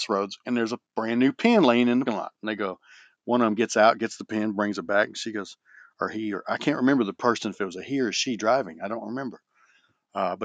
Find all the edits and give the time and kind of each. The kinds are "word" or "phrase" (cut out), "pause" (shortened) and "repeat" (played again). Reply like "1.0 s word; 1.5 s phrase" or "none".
2.1 s word